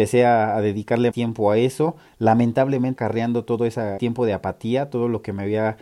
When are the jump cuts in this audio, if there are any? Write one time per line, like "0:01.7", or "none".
0:01.1
0:03.0
0:04.0